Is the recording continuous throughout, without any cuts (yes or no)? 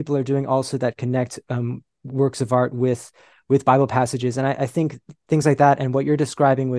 yes